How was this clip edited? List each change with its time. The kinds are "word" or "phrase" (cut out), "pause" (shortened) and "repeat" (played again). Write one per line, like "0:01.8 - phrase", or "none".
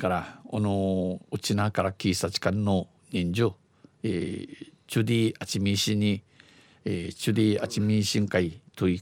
none